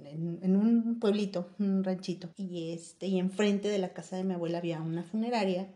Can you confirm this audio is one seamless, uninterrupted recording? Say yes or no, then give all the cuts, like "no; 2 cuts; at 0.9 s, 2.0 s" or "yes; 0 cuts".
no; 1 cut; at 2.3 s